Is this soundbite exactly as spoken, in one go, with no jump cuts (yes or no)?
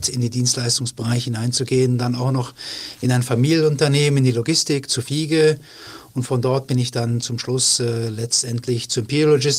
yes